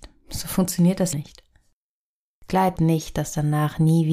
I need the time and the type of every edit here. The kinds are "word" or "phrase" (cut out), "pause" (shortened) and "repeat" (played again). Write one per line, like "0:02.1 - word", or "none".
0:01.1 - word
0:02.8 - word